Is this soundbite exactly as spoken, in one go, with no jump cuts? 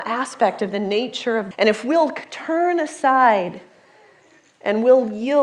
no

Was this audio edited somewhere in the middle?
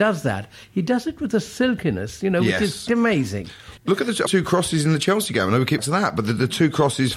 yes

